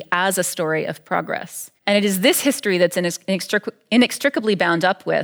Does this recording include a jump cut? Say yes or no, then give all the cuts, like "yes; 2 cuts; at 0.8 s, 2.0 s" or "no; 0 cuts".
yes; 1 cut; at 1.8 s